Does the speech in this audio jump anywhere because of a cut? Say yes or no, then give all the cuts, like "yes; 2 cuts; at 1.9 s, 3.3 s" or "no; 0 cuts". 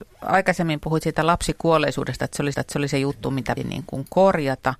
yes; 2 cuts; at 2.5 s, 3.6 s